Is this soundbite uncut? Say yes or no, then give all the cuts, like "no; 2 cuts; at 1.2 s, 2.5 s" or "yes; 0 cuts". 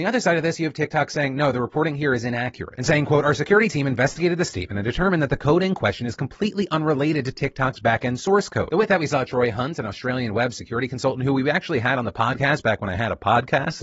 yes; 0 cuts